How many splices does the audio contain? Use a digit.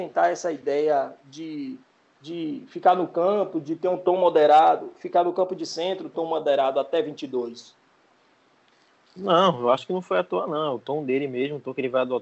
1